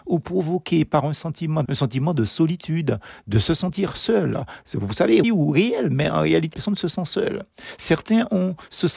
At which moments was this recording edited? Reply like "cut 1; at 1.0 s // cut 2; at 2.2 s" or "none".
cut 1; at 1.6 s // cut 2; at 5.2 s // cut 3; at 6.5 s

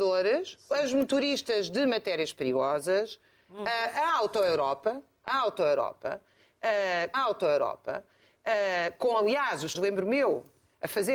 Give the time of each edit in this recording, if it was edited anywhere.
cut 1; at 7.1 s // cut 2; at 9.7 s

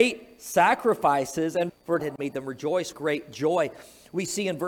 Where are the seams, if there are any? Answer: cut 1; at 1.7 s // cut 2; at 2.0 s // cut 3; at 2.9 s

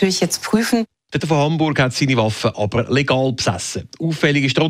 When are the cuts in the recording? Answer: cut 1; at 1.2 s

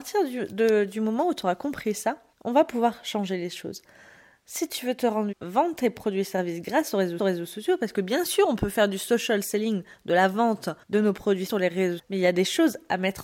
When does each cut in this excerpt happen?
cut 1; at 2.3 s // cut 2; at 5.3 s // cut 3; at 7.2 s // cut 4; at 10.8 s // cut 5; at 11.5 s // cut 6; at 12.0 s

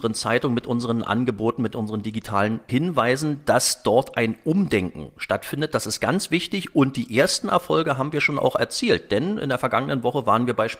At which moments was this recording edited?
none

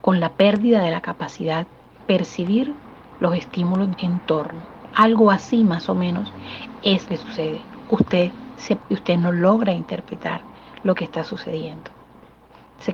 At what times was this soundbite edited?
cut 1; at 2.0 s // cut 2; at 3.9 s // cut 3; at 7.1 s // cut 4; at 8.8 s

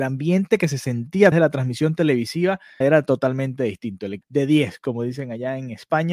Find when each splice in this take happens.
cut 1; at 1.3 s // cut 2; at 2.8 s // cut 3; at 4.2 s

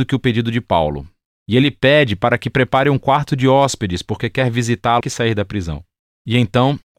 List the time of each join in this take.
cut 1; at 5.0 s

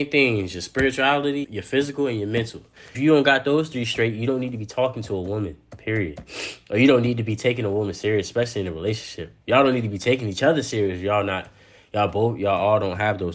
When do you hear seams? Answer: cut 1; at 1.4 s // cut 2; at 2.9 s // cut 3; at 9.4 s

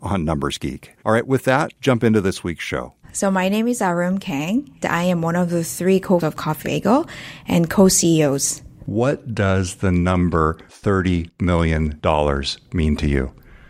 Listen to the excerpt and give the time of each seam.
cut 1; at 1.0 s // cut 2; at 1.8 s // cut 3; at 3.0 s // cut 4; at 4.8 s // cut 5; at 6.2 s // cut 6; at 6.6 s

